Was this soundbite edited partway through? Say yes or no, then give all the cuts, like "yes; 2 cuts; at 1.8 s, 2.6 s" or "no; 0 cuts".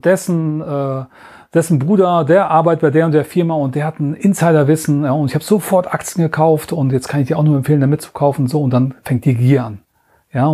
no; 0 cuts